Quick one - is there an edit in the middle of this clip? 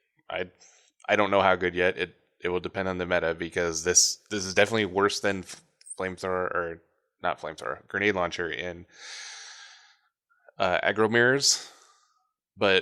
no; 0 cuts

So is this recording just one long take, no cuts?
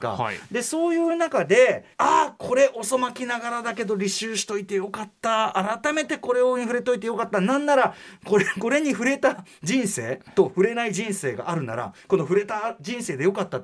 no; 1 cut; at 1.9 s

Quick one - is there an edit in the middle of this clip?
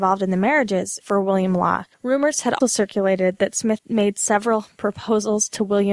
yes; 4 cuts; at 1.0 s, 1.9 s, 2.6 s, 3.8 s

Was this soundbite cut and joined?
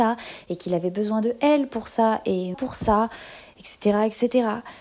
yes; 1 cut; at 2.5 s

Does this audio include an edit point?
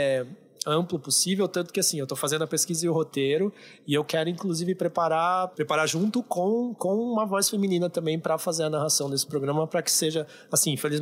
no; 0 cuts

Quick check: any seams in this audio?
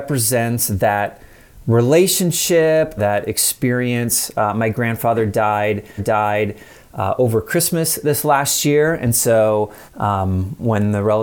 yes; 3 cuts; at 3.0 s, 6.0 s, 9.9 s

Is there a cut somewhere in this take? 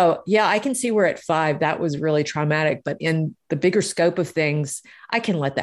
no; 0 cuts

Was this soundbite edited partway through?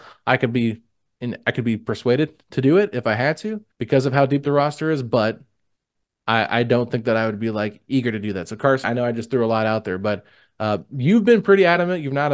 yes; 2 cuts; at 3.7 s, 8.8 s

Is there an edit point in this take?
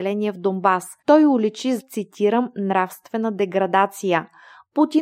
yes; 2 cuts; at 1.0 s, 1.8 s

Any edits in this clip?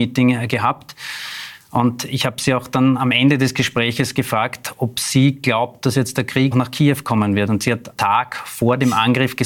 yes; 2 cuts; at 6.5 s, 8.0 s

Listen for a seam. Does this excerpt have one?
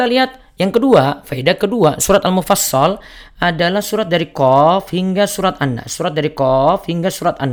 no; 0 cuts

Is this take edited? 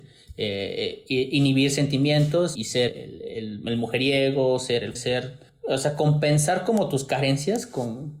yes; 4 cuts; at 1.1 s, 2.6 s, 2.9 s, 5.0 s

